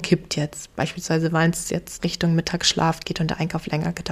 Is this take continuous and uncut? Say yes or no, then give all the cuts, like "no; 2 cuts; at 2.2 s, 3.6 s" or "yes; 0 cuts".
no; 1 cut; at 2.0 s